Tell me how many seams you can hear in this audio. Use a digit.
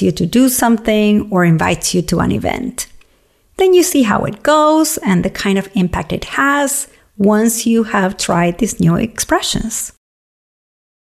0